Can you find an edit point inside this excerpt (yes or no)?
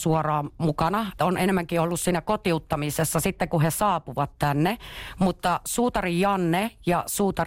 yes